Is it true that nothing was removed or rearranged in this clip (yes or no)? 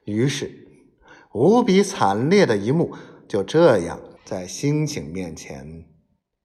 no